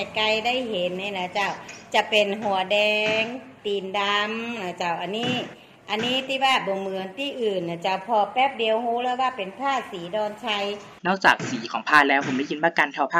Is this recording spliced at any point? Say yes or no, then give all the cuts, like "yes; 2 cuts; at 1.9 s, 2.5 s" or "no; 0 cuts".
yes; 2 cuts; at 3.6 s, 11.0 s